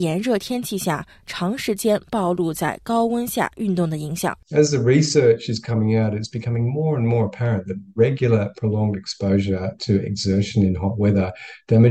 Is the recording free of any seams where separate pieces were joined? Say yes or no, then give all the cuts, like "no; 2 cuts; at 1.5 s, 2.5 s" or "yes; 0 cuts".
no; 1 cut; at 4.4 s